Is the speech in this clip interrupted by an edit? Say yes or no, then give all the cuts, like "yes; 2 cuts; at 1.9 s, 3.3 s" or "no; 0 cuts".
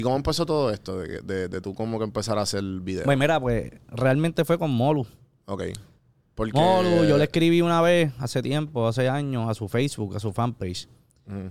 no; 0 cuts